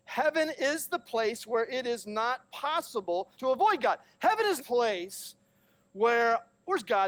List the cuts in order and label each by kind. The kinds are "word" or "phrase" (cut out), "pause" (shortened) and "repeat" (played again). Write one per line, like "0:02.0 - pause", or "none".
0:03.3 - pause
0:04.6 - phrase